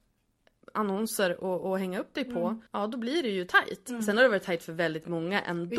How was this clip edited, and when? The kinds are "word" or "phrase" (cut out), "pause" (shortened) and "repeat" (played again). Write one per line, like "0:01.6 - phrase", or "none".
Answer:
0:02.7 - pause